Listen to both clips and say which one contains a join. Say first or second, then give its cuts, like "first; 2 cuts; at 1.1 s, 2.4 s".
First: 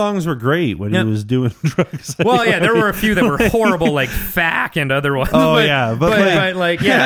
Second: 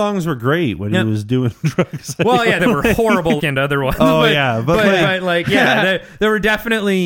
second; 2 cuts; at 2.6 s, 3.4 s